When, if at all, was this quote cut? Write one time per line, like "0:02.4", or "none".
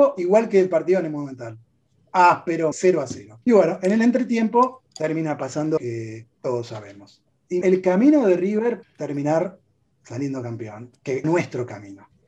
0:02.7
0:03.4
0:04.9
0:05.8
0:06.3
0:07.6
0:08.8
0:11.2